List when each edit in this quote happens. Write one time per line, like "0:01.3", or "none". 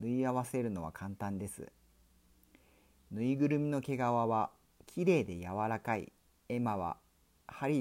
0:06.3

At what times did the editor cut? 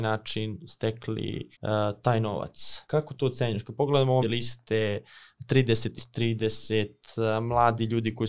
0:01.5
0:02.8
0:04.2
0:06.0

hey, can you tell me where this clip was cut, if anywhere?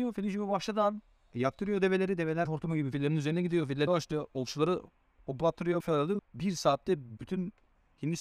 0:02.4
0:03.9
0:05.8
0:06.2
0:07.2

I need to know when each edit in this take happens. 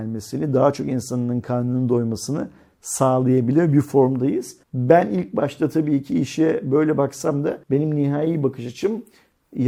0:04.6
0:07.6

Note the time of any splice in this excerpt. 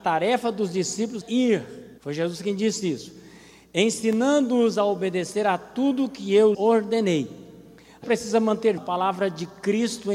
0:01.2
0:02.0
0:06.5
0:08.0
0:08.8

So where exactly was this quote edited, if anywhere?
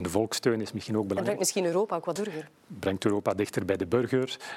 0:02.2

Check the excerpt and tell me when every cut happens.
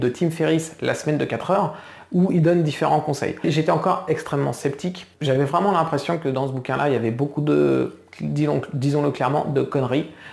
none

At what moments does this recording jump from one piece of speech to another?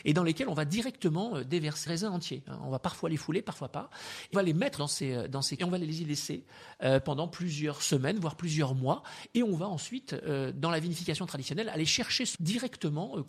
0:01.9
0:04.3
0:04.8
0:05.6
0:12.4

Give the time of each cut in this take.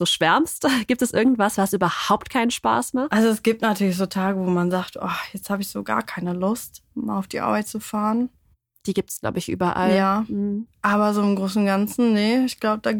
0:06.9

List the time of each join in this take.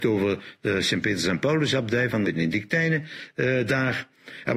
0:02.2

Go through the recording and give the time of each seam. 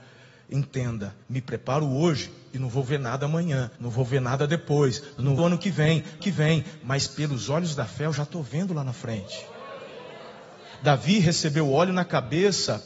0:01.2
0:03.8
0:05.4
0:06.2

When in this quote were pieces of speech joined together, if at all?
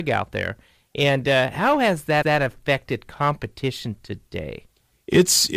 0:02.2

